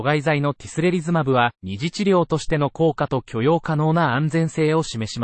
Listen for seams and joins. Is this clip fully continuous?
no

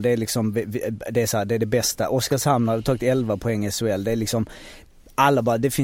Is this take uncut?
yes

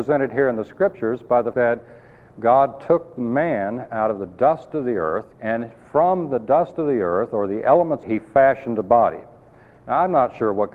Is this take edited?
yes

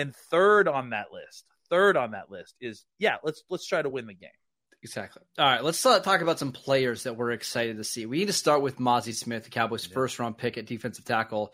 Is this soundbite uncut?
yes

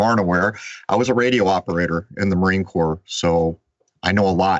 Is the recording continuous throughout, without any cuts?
yes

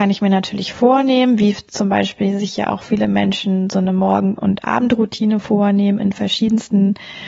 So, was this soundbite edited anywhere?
no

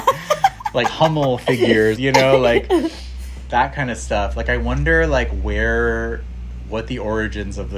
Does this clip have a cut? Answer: yes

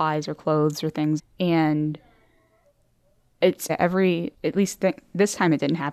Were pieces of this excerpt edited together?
yes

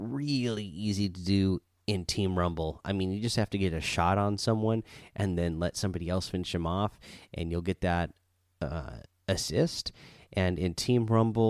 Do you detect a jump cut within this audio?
no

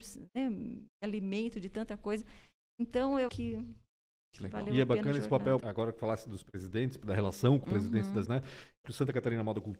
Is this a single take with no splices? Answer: no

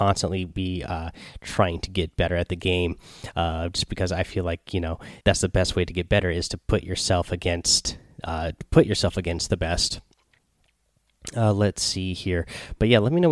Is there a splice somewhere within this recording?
yes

